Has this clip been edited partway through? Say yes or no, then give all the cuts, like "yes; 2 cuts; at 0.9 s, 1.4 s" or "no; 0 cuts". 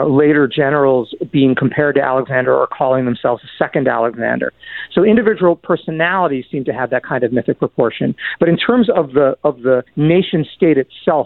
yes; 1 cut; at 9.9 s